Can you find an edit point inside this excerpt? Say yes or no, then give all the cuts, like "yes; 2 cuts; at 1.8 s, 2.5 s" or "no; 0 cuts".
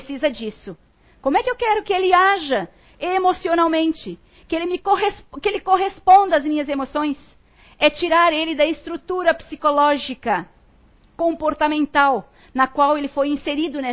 no; 0 cuts